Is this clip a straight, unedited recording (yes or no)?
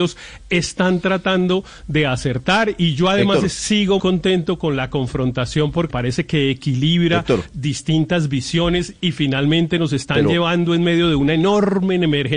no